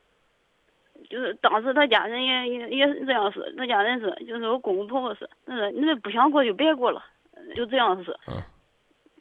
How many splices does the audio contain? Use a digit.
4